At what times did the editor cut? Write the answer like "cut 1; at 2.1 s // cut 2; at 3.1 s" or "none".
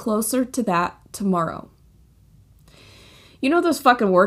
none